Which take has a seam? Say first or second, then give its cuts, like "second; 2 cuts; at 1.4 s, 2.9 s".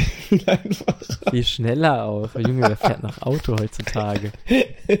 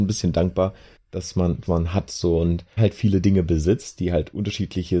second; 3 cuts; at 1.0 s, 1.7 s, 2.8 s